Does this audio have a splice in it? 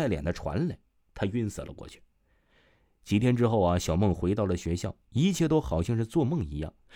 no; 0 cuts

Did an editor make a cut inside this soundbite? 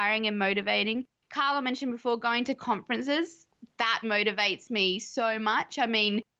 yes; 1 cut; at 4.0 s

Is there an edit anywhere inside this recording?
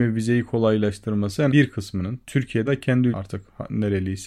yes; 3 cuts; at 1.5 s, 2.7 s, 3.1 s

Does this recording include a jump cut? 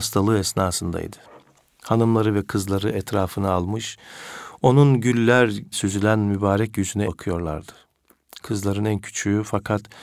yes; 2 cuts; at 5.7 s, 7.0 s

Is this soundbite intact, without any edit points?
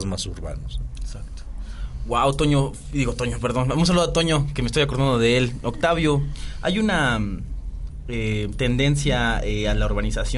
yes; 0 cuts

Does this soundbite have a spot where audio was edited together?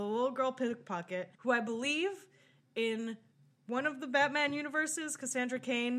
yes; 2 cuts; at 1.3 s, 3.3 s

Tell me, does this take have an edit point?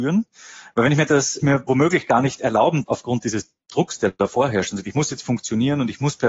yes; 3 cuts; at 1.1 s, 1.4 s, 2.9 s

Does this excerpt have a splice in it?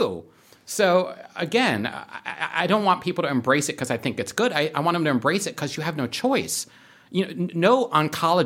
no; 0 cuts

